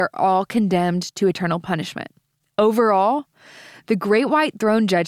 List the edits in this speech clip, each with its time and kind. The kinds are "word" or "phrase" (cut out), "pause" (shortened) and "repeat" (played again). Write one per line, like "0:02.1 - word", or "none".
none

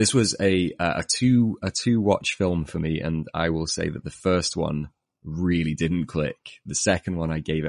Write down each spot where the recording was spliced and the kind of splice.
none

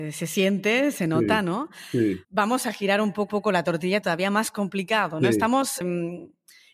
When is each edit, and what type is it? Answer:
0:02.2 - pause
0:03.3 - repeat
0:04.0 - phrase
0:05.8 - word

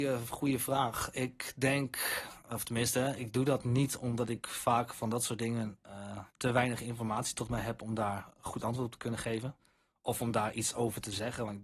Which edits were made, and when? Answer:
0:06.3 - pause

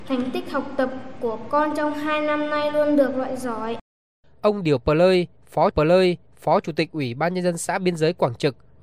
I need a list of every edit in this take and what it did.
0:05.7 - repeat

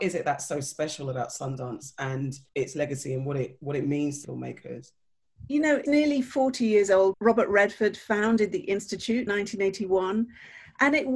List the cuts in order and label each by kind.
0:02.5 - pause
0:04.2 - word
0:05.9 - word
0:07.1 - word
0:09.3 - word

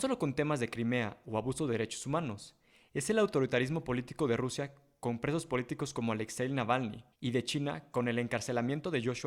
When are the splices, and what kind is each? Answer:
0:07.1 - pause

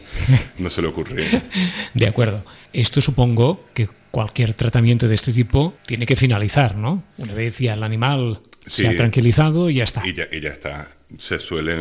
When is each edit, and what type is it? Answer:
0:02.7 - pause
0:05.8 - pause

